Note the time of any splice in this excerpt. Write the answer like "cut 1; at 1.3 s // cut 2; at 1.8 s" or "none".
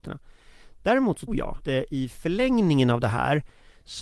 cut 1; at 1.3 s // cut 2; at 1.6 s